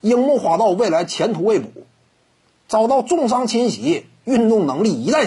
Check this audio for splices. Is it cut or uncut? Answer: uncut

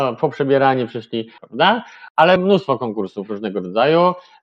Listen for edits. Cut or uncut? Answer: cut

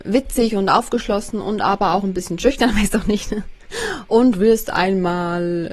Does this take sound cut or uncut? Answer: uncut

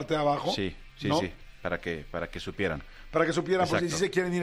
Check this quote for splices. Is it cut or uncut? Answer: uncut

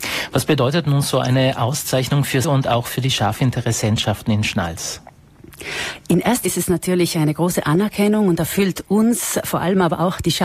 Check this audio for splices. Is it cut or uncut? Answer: cut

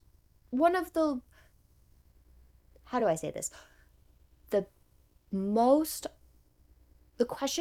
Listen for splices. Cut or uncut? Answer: uncut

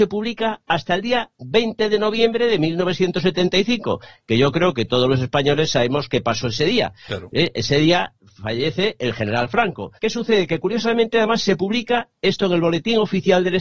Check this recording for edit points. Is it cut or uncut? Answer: cut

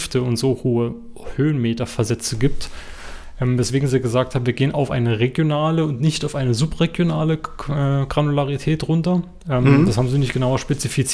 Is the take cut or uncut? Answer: uncut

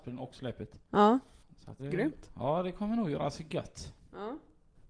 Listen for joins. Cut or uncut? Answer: cut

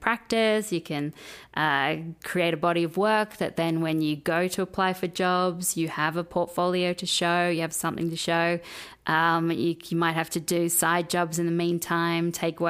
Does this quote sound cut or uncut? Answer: uncut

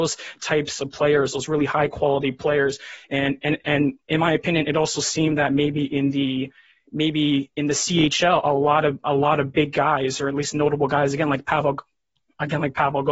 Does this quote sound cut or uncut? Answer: uncut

